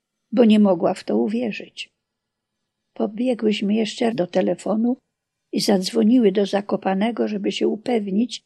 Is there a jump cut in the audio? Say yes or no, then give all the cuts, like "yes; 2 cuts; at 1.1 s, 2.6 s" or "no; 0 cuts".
yes; 1 cut; at 4.1 s